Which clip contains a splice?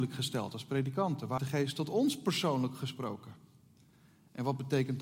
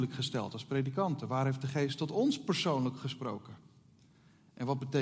first; 1 cut; at 1.4 s

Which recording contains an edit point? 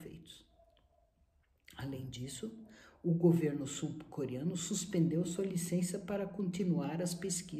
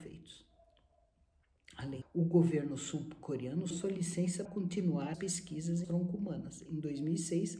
second; 5 cuts; at 2.0 s, 3.7 s, 4.5 s, 5.1 s, 5.8 s

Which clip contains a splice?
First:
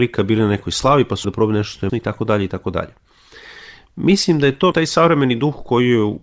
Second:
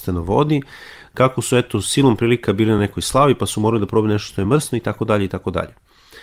first; 3 cuts; at 1.2 s, 1.9 s, 4.7 s

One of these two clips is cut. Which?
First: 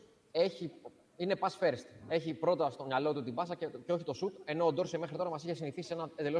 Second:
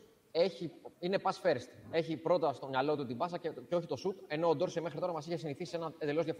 second; 1 cut; at 0.9 s

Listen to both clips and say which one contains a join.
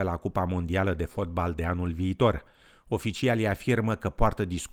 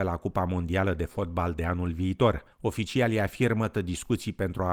second; 2 cuts; at 2.5 s, 3.7 s

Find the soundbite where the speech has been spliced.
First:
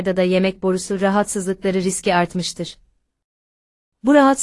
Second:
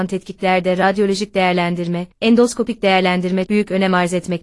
second; 2 cuts; at 2.1 s, 3.5 s

